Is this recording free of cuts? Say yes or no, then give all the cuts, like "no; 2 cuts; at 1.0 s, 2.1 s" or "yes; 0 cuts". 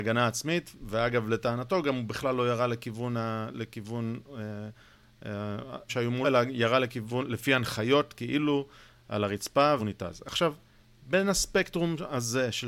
no; 3 cuts; at 5.9 s, 6.2 s, 9.8 s